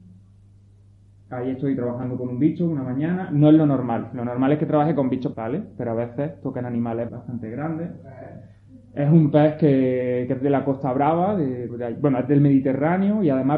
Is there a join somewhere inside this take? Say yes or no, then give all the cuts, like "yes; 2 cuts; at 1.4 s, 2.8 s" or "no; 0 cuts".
yes; 3 cuts; at 5.3 s, 7.1 s, 11.7 s